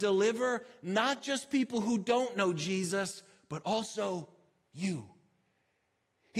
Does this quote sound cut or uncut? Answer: uncut